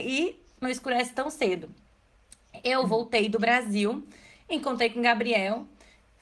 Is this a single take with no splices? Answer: yes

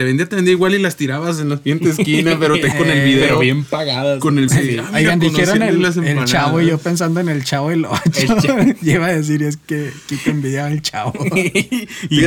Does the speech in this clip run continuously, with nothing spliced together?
no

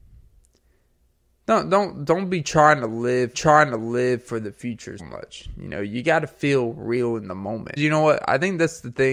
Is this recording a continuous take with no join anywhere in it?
no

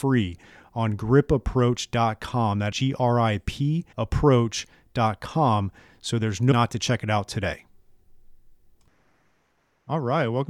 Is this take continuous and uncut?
no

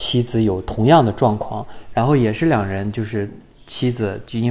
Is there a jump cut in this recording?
no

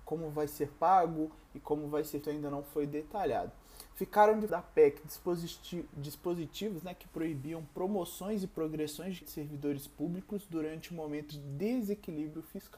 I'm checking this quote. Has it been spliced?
yes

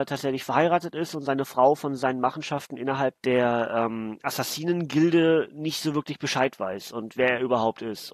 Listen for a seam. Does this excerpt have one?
yes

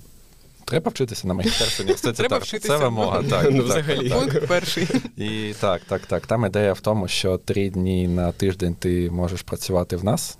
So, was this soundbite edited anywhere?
no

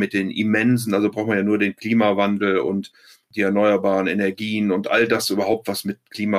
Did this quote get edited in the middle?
no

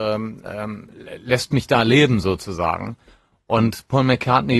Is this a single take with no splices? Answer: yes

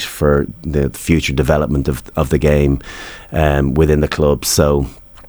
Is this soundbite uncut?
yes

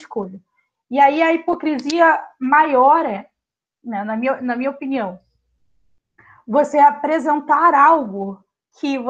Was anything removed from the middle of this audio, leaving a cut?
no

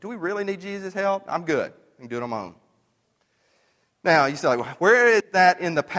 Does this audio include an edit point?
no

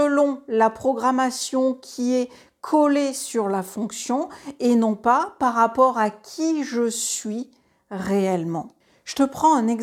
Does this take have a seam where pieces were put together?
no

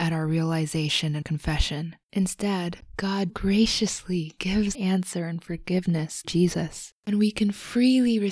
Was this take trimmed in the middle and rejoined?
yes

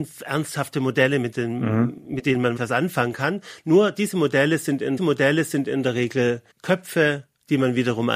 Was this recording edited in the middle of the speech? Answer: yes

